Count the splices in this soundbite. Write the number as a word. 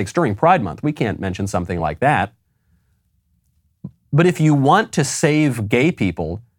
zero